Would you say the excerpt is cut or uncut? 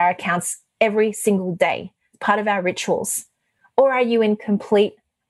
uncut